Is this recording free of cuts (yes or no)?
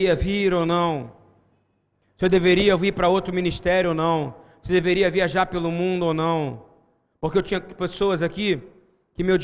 yes